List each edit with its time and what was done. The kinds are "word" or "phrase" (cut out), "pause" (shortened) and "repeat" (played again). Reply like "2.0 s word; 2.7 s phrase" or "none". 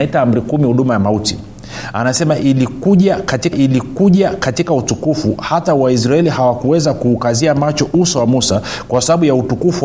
3.5 s repeat